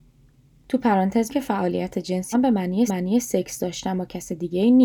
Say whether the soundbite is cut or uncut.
cut